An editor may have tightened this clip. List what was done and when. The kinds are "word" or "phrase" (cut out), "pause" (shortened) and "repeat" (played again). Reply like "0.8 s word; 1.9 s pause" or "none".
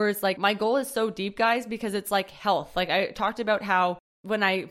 none